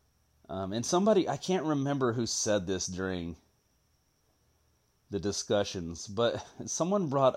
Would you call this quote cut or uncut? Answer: uncut